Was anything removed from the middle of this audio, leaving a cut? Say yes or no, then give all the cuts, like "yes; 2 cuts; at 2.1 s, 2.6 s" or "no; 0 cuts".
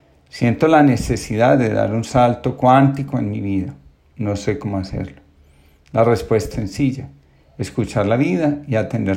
yes; 1 cut; at 6.5 s